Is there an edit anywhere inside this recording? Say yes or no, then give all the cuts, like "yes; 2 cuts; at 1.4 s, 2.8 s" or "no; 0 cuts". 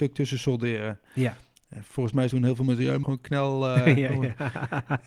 yes; 2 cuts; at 2.3 s, 3.0 s